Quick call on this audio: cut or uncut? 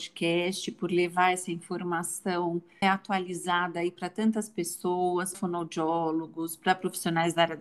cut